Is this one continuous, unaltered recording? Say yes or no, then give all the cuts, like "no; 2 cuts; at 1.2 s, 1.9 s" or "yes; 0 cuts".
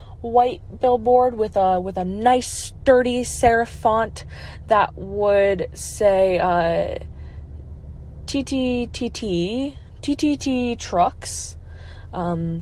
yes; 0 cuts